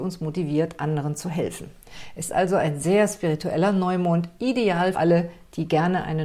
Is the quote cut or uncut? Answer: cut